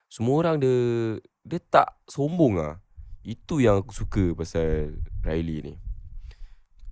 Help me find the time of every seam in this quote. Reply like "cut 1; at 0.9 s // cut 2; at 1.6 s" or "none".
none

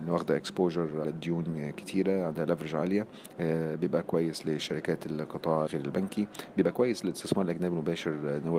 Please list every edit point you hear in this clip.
cut 1; at 1.0 s // cut 2; at 5.7 s

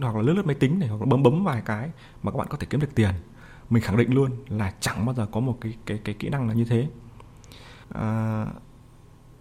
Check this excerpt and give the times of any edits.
cut 1; at 7.8 s

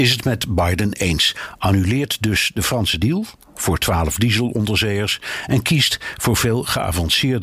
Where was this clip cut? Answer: none

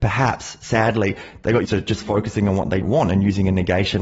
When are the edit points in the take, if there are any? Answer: cut 1; at 1.6 s // cut 2; at 2.8 s

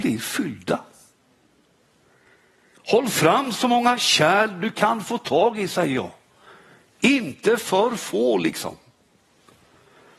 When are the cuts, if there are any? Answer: none

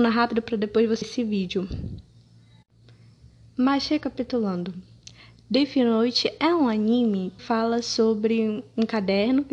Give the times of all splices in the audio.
cut 1; at 1.0 s // cut 2; at 7.4 s

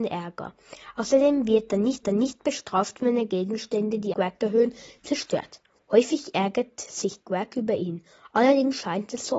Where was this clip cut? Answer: cut 1; at 2.0 s // cut 2; at 4.1 s

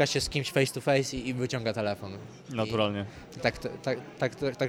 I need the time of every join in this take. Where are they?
none

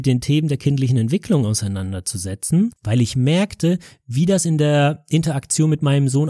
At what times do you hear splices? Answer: none

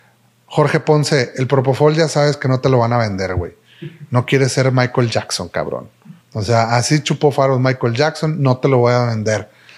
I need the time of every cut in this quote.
cut 1; at 6.2 s

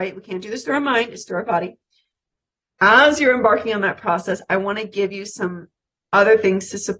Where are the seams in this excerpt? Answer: none

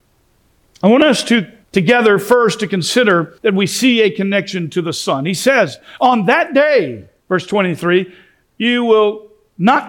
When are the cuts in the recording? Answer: cut 1; at 1.6 s // cut 2; at 3.4 s // cut 3; at 7.2 s

